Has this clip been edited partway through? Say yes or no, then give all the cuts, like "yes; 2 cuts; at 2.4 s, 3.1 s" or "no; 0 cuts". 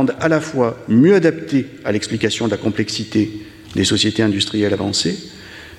no; 0 cuts